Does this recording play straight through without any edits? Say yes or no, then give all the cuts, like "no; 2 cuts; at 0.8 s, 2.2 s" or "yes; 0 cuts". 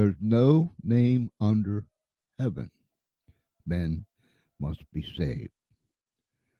no; 1 cut; at 3.6 s